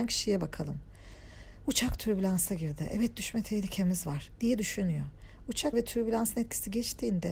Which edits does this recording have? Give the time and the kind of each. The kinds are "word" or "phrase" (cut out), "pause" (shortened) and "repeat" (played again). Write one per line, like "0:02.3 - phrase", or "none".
0:05.7 - word